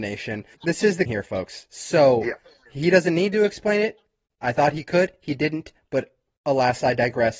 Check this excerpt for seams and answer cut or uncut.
cut